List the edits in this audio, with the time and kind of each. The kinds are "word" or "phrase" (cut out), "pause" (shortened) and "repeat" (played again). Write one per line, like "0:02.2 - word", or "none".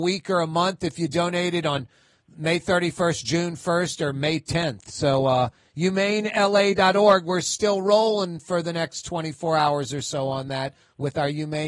none